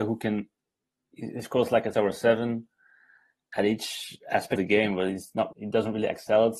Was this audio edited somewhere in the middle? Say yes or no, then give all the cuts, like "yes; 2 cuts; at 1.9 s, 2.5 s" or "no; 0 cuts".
yes; 3 cuts; at 1.9 s, 4.6 s, 5.5 s